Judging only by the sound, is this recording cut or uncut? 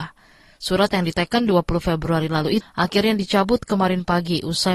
cut